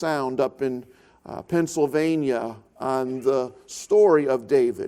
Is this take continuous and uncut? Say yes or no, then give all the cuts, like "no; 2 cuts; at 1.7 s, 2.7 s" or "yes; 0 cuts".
yes; 0 cuts